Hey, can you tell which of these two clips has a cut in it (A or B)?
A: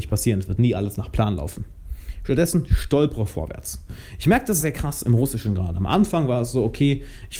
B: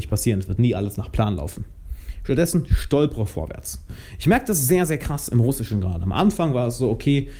A